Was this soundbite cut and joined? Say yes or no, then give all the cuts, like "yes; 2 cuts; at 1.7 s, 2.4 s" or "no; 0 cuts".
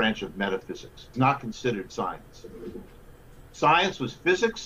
yes; 1 cut; at 1.1 s